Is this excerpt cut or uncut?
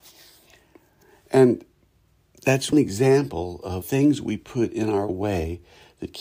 cut